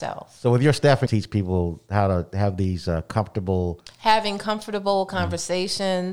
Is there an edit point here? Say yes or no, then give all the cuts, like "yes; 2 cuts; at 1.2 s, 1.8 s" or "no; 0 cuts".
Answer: yes; 1 cut; at 1.1 s